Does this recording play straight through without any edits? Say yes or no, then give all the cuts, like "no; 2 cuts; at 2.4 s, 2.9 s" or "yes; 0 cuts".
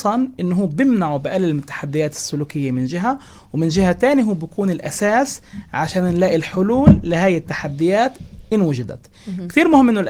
yes; 0 cuts